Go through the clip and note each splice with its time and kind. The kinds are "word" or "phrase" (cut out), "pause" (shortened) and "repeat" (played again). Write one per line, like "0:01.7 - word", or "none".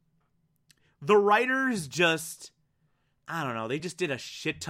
none

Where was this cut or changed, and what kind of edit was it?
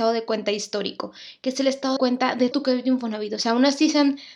0:02.0 - word
0:02.5 - word

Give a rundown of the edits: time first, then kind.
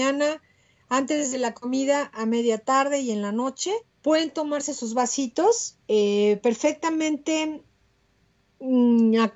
0:03.9 - pause
0:05.8 - pause

